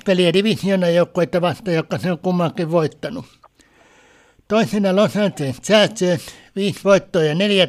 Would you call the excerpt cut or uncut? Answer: uncut